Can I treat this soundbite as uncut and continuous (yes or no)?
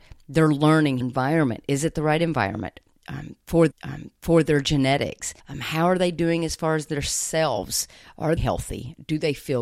no